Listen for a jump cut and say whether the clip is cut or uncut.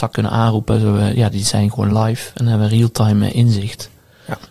uncut